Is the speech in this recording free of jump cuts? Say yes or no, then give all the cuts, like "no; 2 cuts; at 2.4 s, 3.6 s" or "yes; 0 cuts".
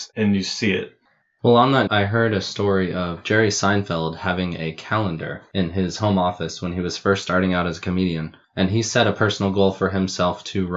no; 2 cuts; at 1.9 s, 8.4 s